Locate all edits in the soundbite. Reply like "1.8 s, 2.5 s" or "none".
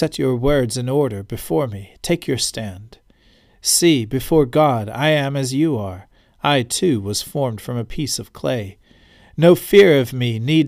none